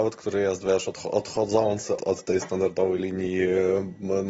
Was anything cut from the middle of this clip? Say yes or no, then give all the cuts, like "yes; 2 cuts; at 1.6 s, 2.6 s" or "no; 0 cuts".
yes; 1 cut; at 2.0 s